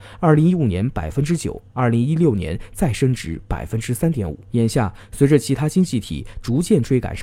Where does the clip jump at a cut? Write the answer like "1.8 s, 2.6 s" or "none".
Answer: 4.4 s